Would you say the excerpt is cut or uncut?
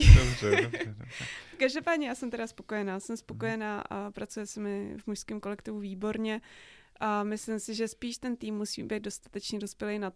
uncut